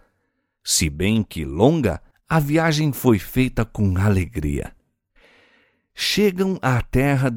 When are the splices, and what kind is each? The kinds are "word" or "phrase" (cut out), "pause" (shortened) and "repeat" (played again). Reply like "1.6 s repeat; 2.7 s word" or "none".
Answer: 2.1 s pause